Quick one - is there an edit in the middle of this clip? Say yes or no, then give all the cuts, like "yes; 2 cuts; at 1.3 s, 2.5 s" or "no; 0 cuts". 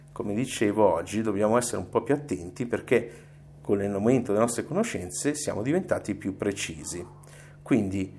no; 0 cuts